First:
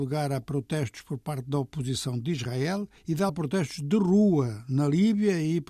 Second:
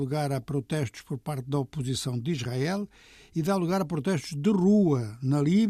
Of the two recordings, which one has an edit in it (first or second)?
first